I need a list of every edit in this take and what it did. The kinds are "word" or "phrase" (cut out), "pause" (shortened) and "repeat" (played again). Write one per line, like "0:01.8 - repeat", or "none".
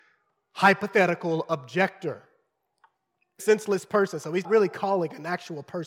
0:03.4 - word
0:04.4 - word